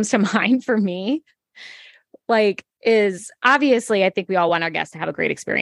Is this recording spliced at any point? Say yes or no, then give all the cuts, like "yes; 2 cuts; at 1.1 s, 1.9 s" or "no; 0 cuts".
no; 0 cuts